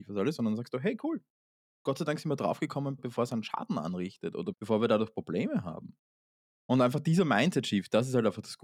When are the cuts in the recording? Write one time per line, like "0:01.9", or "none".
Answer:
0:03.0
0:04.5